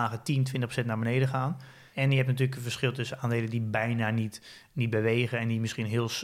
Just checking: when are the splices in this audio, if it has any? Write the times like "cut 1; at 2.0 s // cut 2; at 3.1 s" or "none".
none